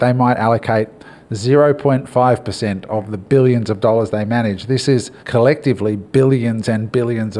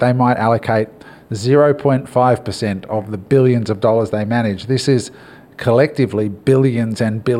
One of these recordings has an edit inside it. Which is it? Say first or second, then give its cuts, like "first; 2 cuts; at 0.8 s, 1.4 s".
first; 1 cut; at 5.2 s